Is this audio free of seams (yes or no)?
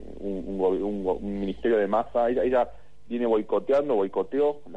yes